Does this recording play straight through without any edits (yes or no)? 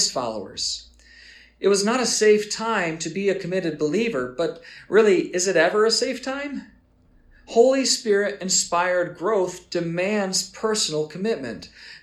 yes